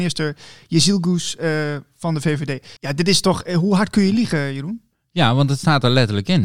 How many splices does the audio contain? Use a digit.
1